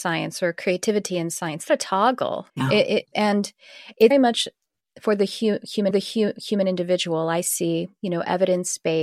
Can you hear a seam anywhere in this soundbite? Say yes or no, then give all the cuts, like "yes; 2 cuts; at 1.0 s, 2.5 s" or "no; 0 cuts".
yes; 5 cuts; at 1.7 s, 2.5 s, 3.1 s, 4.1 s, 5.9 s